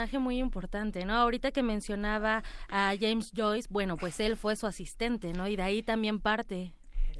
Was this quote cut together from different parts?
no; 0 cuts

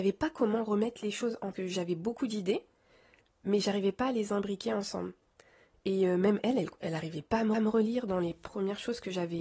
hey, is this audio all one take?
no; 2 cuts; at 1.5 s, 7.5 s

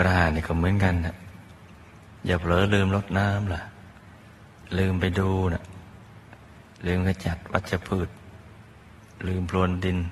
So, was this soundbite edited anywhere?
no; 0 cuts

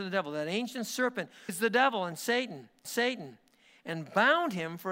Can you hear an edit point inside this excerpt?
yes; 2 cuts; at 1.5 s, 2.8 s

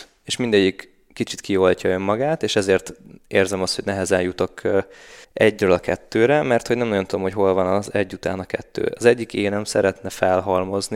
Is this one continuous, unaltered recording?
no; 1 cut; at 5.2 s

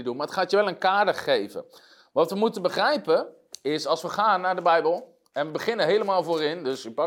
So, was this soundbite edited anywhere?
no; 0 cuts

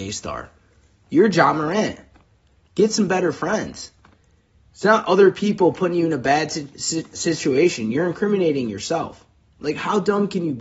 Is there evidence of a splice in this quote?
no; 0 cuts

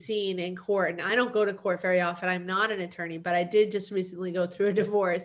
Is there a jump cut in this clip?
no; 0 cuts

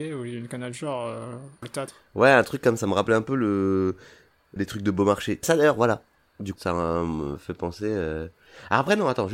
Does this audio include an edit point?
yes; 5 cuts; at 1.6 s, 2.8 s, 4.6 s, 5.4 s, 6.6 s

